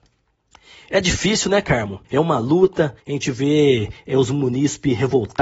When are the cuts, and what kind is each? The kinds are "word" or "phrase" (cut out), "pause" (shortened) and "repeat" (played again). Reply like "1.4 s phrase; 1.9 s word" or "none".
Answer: 2.0 s pause; 3.0 s pause